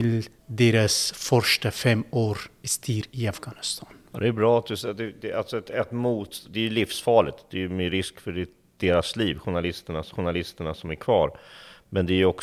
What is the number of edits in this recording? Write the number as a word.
one